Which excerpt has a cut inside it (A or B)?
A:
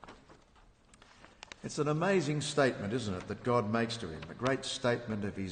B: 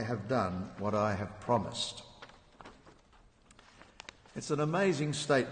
A